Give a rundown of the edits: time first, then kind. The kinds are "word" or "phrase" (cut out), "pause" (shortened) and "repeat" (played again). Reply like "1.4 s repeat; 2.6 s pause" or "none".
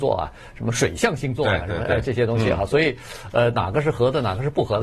none